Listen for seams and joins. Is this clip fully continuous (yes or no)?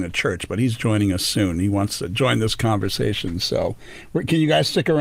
yes